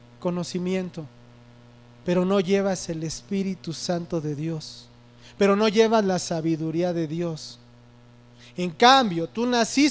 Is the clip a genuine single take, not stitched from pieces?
yes; 0 cuts

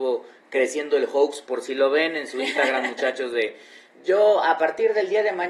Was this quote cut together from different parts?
no; 0 cuts

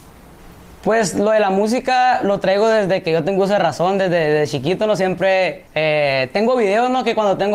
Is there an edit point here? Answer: yes; 1 cut; at 5.7 s

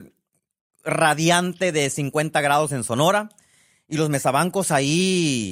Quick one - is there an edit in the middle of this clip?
no; 0 cuts

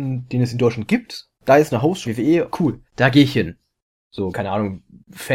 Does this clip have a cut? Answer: yes; 5 cuts; at 1.4 s, 2.1 s, 2.5 s, 2.9 s, 4.3 s

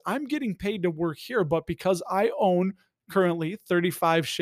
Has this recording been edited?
no; 0 cuts

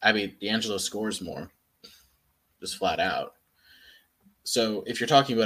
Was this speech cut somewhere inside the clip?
no; 0 cuts

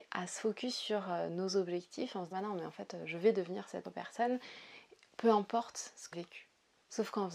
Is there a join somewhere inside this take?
yes; 3 cuts; at 2.3 s, 3.8 s, 6.1 s

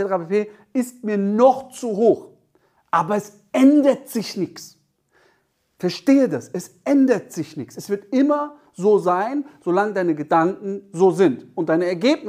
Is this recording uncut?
yes; 0 cuts

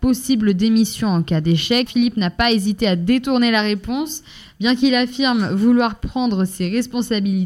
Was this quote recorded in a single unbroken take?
no; 1 cut; at 1.9 s

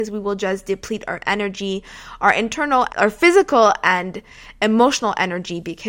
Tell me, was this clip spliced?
yes; 1 cut; at 2.9 s

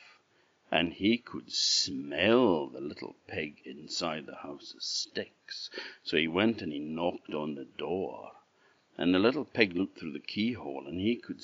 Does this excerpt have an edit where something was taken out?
no; 0 cuts

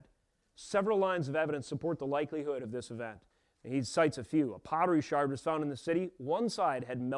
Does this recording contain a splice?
yes; 1 cut; at 3.3 s

